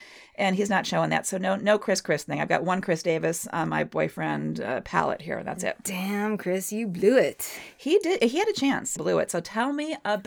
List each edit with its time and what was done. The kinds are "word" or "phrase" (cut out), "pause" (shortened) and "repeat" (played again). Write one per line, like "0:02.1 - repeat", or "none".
0:09.0 - phrase